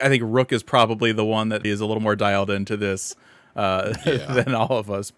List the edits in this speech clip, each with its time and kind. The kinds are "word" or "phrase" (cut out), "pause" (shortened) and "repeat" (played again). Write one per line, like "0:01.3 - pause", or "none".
0:01.6 - word